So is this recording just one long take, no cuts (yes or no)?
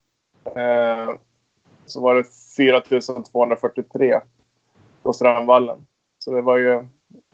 yes